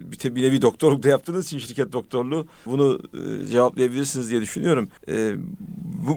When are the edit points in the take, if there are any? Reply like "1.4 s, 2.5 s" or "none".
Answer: 2.7 s, 5.0 s